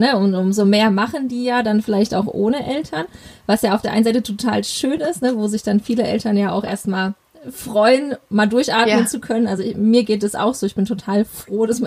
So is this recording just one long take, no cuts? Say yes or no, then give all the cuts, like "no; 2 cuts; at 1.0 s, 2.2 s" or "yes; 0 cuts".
yes; 0 cuts